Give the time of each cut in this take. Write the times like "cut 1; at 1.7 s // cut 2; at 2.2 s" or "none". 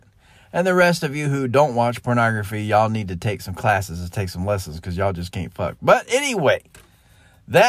none